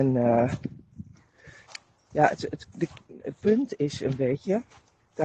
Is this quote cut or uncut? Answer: uncut